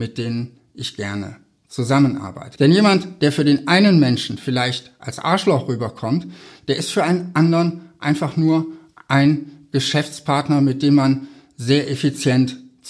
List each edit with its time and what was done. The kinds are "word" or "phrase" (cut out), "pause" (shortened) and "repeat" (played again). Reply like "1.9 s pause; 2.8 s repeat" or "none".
none